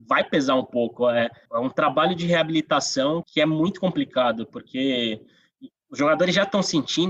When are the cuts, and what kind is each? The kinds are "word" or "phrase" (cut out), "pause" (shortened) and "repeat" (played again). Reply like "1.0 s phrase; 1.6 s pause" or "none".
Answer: 1.5 s word; 3.2 s word; 5.7 s pause